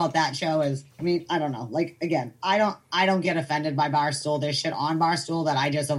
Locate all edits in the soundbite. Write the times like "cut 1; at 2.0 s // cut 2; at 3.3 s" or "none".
cut 1; at 0.9 s